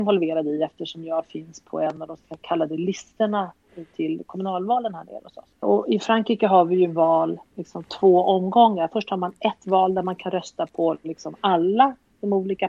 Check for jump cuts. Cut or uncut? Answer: cut